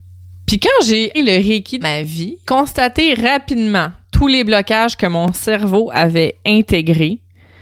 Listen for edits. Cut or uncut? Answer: cut